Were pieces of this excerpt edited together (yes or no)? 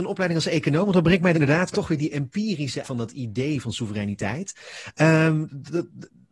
yes